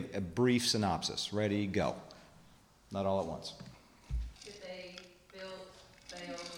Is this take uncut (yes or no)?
no